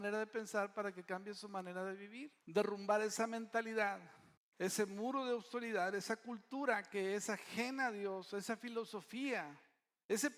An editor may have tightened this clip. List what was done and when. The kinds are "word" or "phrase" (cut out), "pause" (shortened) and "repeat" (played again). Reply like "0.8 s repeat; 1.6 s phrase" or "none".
2.4 s pause; 4.4 s pause